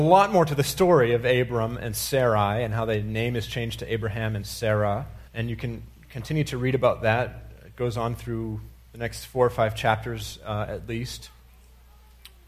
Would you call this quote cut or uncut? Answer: cut